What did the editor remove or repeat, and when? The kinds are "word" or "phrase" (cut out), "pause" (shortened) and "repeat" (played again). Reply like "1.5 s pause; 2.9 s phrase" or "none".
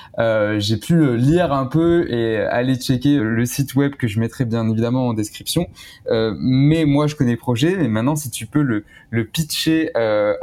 3.2 s word